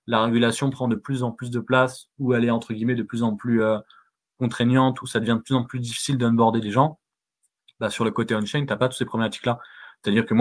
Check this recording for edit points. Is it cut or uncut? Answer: uncut